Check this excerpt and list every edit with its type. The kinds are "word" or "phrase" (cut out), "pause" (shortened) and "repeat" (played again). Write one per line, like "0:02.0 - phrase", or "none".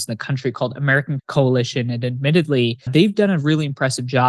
0:01.2 - word
0:02.9 - word